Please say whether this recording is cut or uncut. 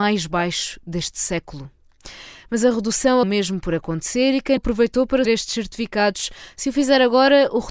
cut